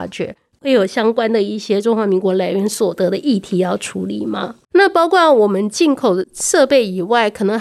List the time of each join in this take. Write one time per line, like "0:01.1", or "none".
0:04.6